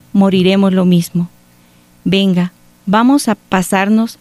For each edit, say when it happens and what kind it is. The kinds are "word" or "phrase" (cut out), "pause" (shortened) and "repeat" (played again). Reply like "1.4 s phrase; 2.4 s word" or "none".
none